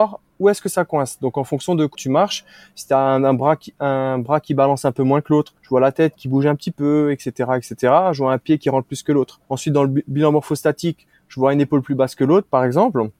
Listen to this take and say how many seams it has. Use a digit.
4